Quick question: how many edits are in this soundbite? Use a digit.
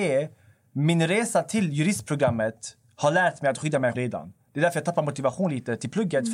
1